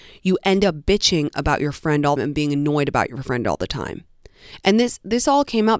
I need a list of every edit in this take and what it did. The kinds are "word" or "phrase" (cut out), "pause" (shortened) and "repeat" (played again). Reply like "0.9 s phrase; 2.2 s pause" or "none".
2.2 s phrase